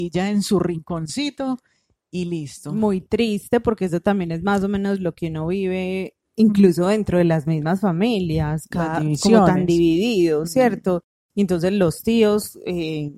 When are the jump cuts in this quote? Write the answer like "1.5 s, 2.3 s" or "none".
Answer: none